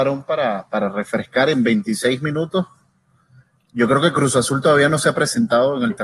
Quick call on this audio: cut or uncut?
uncut